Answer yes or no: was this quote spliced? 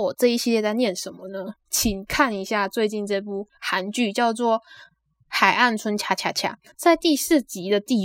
yes